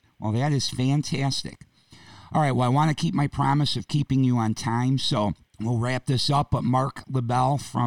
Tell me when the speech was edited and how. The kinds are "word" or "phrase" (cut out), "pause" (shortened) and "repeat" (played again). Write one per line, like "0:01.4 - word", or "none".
0:05.5 - pause